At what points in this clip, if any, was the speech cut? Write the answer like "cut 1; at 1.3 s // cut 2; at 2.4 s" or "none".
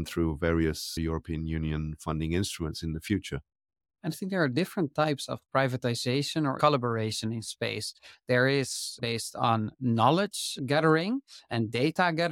cut 1; at 6.6 s // cut 2; at 9.0 s